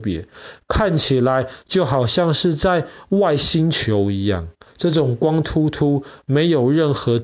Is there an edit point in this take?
no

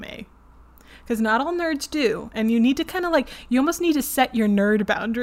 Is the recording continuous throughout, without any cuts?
yes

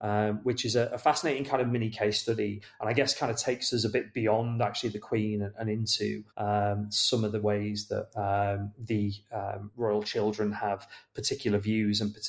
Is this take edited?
yes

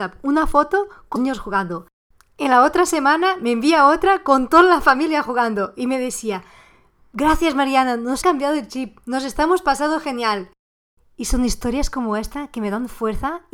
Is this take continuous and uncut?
no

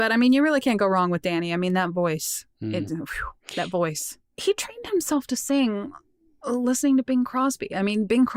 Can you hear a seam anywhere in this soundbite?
no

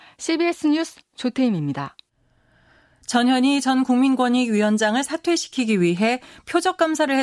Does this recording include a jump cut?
no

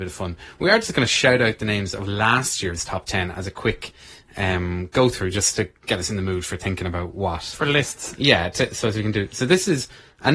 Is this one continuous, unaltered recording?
yes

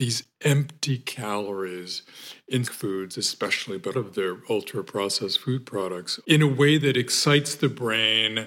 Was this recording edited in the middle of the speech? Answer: yes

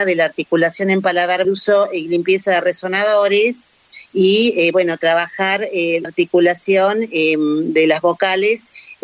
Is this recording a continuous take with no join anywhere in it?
no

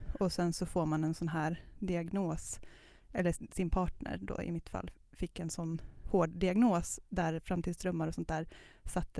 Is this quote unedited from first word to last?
yes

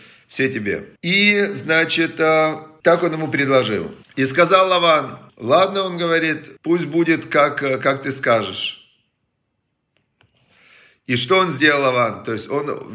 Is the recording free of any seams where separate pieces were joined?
no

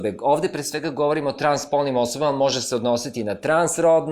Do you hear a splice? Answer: no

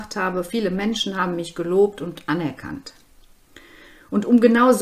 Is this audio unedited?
yes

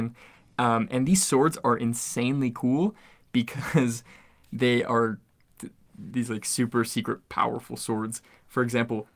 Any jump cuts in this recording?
no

